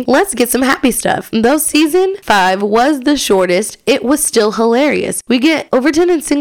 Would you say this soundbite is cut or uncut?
uncut